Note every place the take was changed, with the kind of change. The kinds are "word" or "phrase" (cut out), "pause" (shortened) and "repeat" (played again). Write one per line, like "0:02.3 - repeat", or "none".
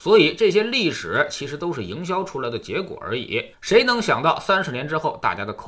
0:03.5 - pause